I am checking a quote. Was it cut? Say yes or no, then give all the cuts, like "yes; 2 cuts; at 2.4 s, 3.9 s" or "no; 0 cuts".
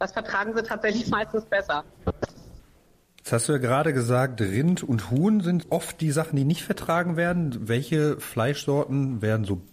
yes; 1 cut; at 5.6 s